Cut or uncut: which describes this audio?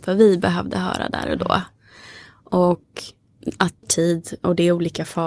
cut